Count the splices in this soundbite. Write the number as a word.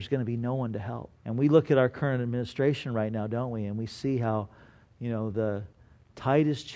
one